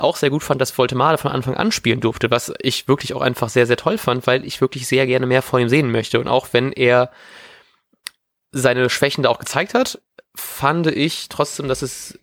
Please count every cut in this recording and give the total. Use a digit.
0